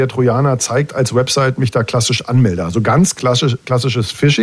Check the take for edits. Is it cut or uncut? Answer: uncut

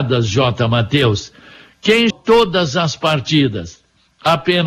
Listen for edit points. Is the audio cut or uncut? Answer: cut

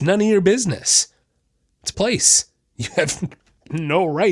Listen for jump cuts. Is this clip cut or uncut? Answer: cut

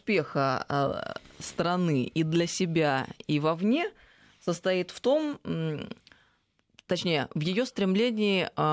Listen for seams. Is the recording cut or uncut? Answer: uncut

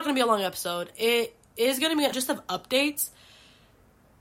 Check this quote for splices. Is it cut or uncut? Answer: cut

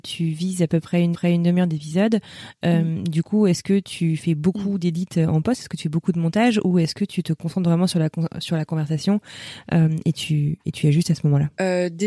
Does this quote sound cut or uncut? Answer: cut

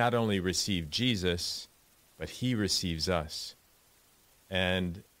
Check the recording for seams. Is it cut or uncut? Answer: uncut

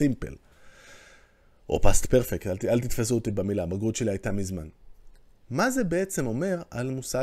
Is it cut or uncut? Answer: uncut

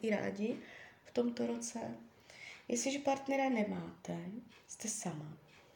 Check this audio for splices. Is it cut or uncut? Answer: uncut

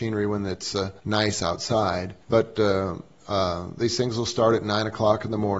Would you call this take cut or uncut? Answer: cut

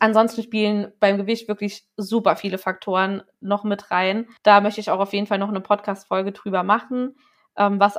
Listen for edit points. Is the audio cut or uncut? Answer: cut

